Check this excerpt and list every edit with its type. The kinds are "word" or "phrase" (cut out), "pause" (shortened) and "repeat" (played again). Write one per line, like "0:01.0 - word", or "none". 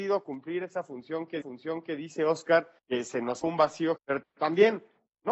0:01.4 - repeat
0:02.8 - pause
0:03.4 - word
0:04.0 - word